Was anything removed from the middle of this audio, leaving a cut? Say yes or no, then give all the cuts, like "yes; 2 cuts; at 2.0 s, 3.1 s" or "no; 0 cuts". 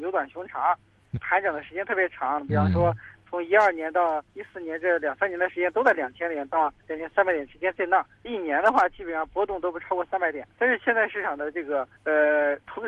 yes; 6 cuts; at 1.2 s, 4.3 s, 6.8 s, 8.2 s, 10.5 s, 12.0 s